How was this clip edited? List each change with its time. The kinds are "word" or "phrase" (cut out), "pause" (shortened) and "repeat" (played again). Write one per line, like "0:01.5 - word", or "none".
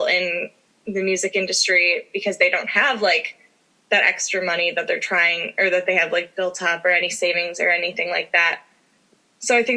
none